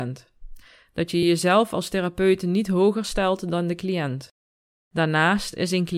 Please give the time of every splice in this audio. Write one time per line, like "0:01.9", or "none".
none